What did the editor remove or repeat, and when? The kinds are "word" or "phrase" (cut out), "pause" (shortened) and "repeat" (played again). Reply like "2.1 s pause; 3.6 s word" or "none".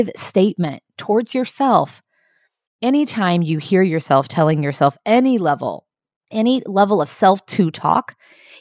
none